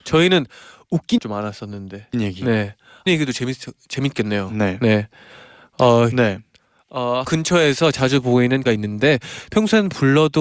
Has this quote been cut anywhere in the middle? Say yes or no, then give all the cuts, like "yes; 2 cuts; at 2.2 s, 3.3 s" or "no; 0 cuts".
yes; 6 cuts; at 1.2 s, 2.1 s, 3.1 s, 6.1 s, 7.2 s, 8.7 s